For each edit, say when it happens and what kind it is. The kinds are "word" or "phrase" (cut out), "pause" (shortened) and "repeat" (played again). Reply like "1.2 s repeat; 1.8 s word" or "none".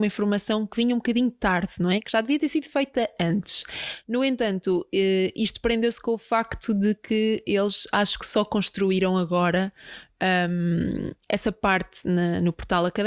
none